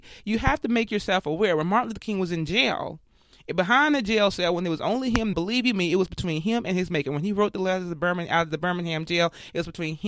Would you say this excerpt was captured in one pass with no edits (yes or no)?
no